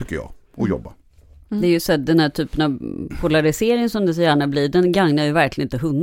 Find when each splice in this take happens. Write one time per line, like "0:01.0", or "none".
none